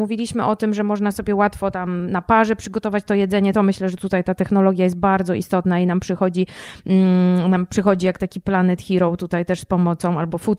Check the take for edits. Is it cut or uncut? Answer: uncut